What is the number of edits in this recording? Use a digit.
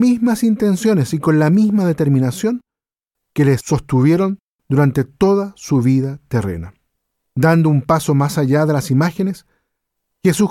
0